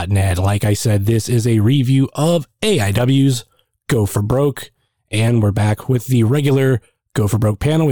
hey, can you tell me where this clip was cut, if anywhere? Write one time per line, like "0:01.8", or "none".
none